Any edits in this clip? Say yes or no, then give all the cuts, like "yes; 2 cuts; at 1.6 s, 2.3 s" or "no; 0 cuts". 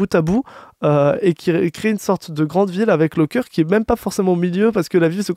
no; 0 cuts